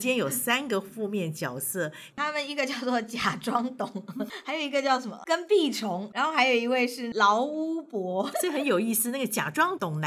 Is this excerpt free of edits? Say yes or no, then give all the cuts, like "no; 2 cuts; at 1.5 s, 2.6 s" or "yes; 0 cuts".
no; 1 cut; at 8.3 s